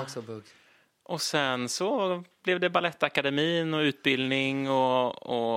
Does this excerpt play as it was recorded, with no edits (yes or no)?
yes